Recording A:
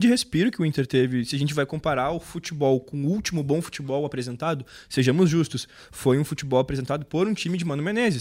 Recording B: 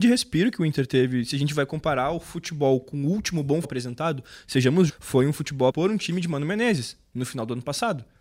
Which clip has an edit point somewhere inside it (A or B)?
B